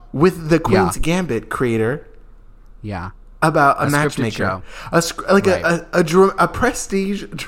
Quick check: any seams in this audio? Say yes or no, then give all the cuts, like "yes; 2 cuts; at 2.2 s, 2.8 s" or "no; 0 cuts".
no; 0 cuts